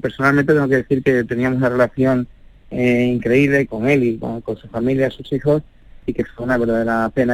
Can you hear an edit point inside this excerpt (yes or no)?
no